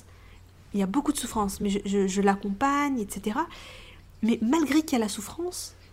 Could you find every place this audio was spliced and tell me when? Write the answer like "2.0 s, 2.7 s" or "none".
none